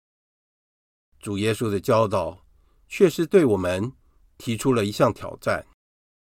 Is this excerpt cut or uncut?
uncut